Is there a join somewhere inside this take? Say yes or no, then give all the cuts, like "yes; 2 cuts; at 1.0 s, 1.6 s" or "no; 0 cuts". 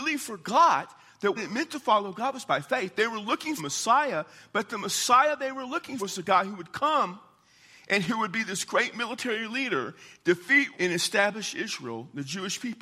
yes; 4 cuts; at 1.4 s, 3.6 s, 6.0 s, 10.7 s